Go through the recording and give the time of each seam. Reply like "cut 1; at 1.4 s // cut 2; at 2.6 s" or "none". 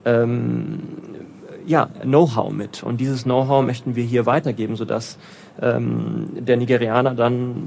cut 1; at 2.0 s